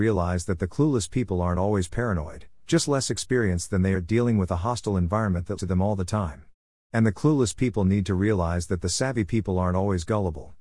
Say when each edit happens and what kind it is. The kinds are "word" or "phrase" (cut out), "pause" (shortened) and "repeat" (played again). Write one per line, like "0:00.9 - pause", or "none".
0:03.9 - word
0:05.6 - word